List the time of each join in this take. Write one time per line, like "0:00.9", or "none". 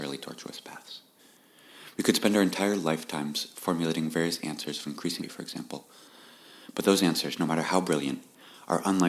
0:05.2